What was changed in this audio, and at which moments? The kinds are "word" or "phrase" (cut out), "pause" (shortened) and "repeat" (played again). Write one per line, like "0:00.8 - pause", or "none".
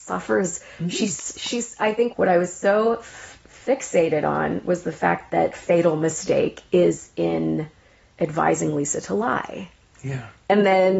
0:02.1 - phrase
0:05.5 - phrase